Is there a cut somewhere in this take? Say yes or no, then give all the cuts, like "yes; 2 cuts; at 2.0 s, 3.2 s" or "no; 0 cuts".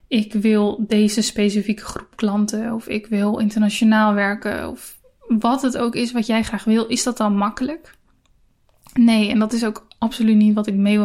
no; 0 cuts